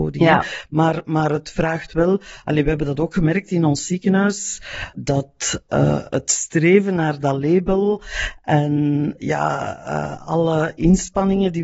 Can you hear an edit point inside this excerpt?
yes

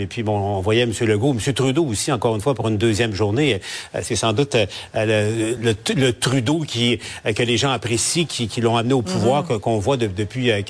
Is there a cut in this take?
no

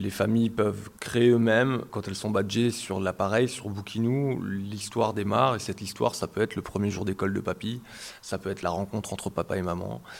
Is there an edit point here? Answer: no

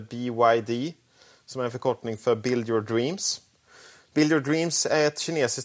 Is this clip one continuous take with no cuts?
yes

